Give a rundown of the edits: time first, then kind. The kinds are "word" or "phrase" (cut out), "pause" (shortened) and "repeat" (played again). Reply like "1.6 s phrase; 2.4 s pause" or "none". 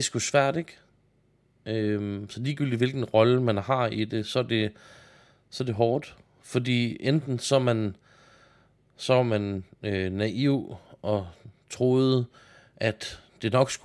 none